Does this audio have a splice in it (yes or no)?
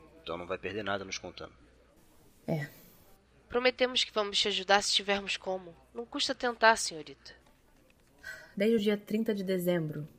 no